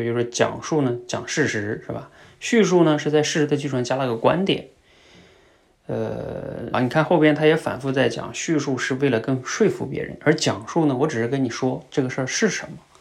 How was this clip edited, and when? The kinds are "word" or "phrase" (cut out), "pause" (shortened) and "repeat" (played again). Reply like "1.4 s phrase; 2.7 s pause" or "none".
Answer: 6.7 s word